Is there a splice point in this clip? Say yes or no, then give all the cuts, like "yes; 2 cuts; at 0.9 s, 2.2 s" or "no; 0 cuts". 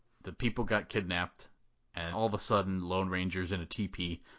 yes; 1 cut; at 2.1 s